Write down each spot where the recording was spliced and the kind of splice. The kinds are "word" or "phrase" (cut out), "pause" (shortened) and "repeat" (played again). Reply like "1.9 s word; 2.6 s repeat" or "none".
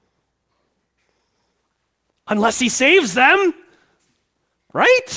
none